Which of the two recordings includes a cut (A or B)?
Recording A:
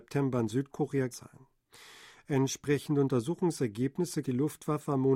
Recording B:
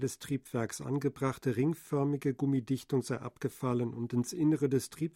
A